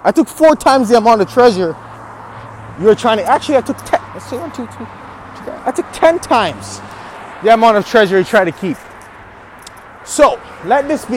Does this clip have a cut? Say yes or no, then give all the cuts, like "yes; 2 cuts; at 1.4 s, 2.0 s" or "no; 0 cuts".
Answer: no; 0 cuts